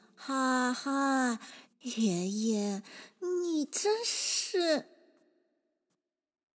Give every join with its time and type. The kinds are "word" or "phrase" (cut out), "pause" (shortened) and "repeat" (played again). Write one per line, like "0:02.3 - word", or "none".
0:01.6 - phrase